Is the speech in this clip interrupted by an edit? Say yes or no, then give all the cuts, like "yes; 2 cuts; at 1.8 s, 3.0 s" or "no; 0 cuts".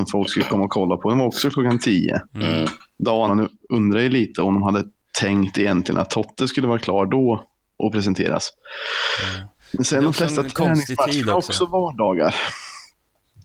yes; 2 cuts; at 2.3 s, 3.3 s